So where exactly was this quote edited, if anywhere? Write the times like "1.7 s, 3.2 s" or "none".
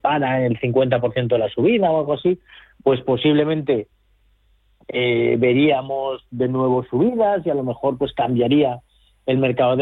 none